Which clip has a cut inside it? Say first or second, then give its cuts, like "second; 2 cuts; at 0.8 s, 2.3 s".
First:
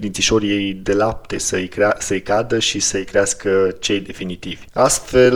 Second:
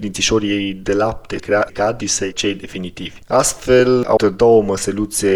second; 5 cuts; at 1.4 s, 1.7 s, 2.0 s, 2.3 s, 4.2 s